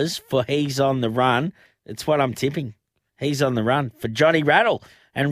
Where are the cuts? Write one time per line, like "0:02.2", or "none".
none